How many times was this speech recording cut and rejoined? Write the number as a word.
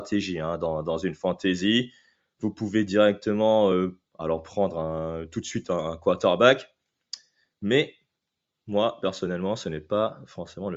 zero